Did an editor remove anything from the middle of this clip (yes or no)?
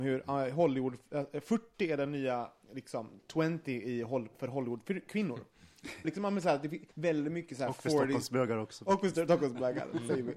yes